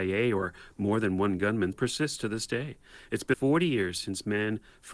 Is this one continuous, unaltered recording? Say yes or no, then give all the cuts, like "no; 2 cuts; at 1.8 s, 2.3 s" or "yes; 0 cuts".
no; 2 cuts; at 1.7 s, 3.3 s